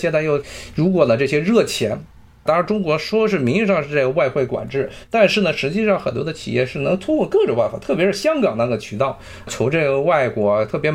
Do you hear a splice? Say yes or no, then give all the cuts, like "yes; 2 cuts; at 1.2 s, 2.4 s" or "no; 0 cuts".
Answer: no; 0 cuts